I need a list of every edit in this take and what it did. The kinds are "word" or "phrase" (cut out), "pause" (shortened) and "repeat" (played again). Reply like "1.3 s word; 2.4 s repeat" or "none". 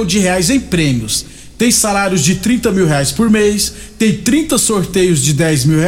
none

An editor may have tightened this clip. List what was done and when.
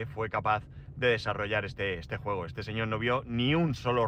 none

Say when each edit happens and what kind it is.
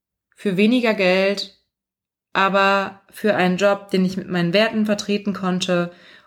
none

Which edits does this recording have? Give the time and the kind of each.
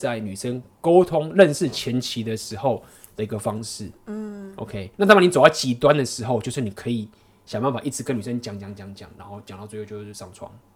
4.9 s pause

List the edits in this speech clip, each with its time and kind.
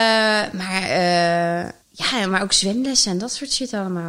1.8 s pause

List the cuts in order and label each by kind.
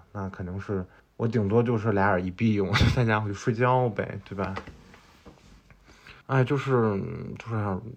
1.0 s pause; 6.2 s pause

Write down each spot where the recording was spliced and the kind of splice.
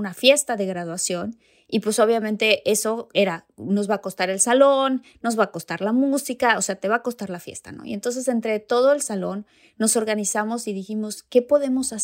none

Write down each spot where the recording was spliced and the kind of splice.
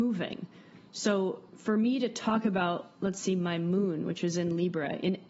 1.5 s pause

